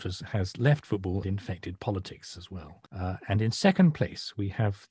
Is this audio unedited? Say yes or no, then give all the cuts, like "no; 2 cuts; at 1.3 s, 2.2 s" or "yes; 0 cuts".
no; 2 cuts; at 1.2 s, 2.9 s